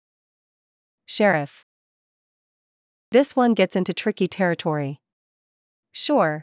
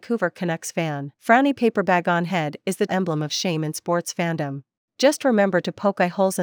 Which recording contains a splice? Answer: second; 3 cuts; at 1.1 s, 2.9 s, 4.8 s

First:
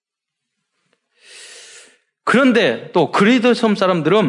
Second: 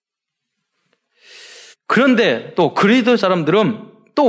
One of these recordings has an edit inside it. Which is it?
second; 2 cuts; at 1.7 s, 3.2 s

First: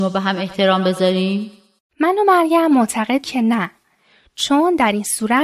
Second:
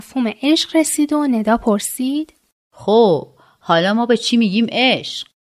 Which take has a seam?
first; 1 cut; at 3.2 s

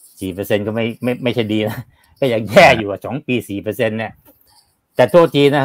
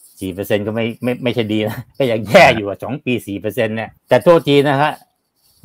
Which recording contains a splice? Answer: second; 2 cuts; at 1.9 s, 4.0 s

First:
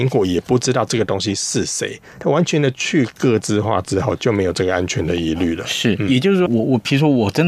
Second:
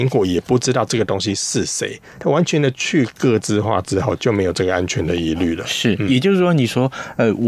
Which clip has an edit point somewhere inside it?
first; 1 cut; at 6.5 s

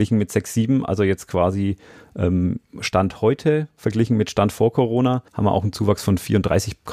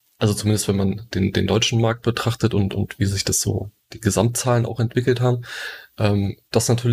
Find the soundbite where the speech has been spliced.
first; 1 cut; at 5.3 s

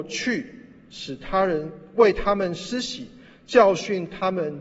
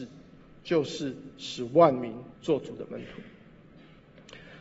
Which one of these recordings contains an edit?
second; 1 cut; at 2.3 s

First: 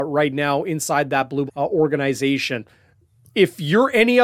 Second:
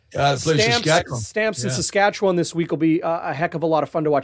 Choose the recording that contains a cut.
first; 1 cut; at 1.5 s

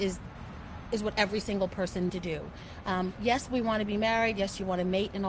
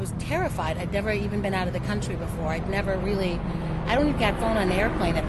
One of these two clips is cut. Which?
first; 1 cut; at 2.1 s

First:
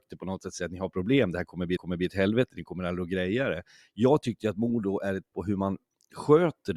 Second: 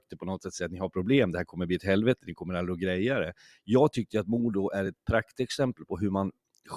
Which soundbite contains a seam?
first; 2 cuts; at 1.8 s, 5.3 s

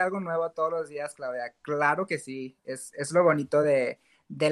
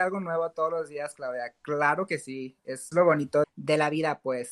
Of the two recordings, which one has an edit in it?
second; 2 cuts; at 2.9 s, 3.4 s

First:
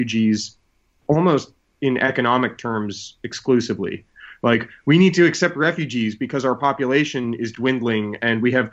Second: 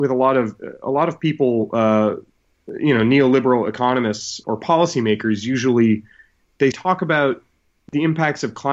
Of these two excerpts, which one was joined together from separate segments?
second; 2 cuts; at 4.4 s, 6.7 s

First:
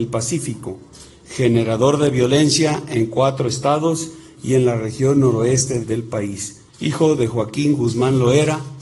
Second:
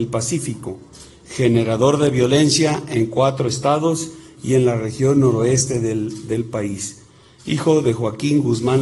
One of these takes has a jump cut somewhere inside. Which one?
first; 2 cuts; at 5.8 s, 6.7 s

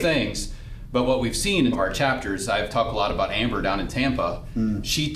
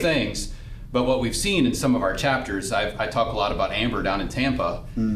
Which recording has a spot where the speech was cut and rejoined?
first; 2 cuts; at 1.7 s, 2.7 s

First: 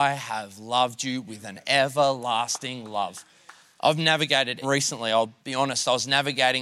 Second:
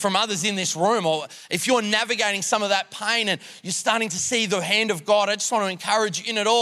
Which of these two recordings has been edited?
first; 2 cuts; at 4.6 s, 5.4 s

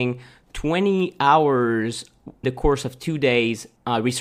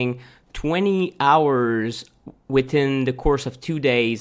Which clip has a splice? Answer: first; 1 cut; at 2.4 s

